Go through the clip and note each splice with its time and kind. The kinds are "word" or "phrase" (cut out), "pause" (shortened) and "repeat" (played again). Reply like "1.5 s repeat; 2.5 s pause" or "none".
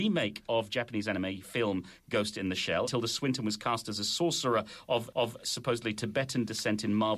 2.9 s word; 5.1 s repeat